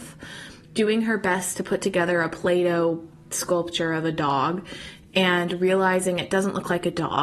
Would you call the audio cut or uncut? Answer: uncut